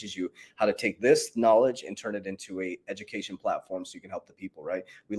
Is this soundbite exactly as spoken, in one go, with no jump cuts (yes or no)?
yes